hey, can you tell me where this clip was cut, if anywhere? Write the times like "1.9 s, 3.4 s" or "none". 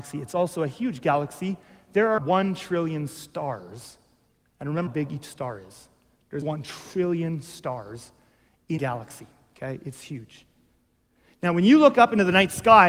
2.2 s, 4.9 s, 6.4 s, 8.8 s